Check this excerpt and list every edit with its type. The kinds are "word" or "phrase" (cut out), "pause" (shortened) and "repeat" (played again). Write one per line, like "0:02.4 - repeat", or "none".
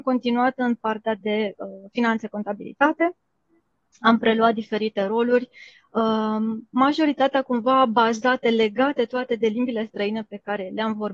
none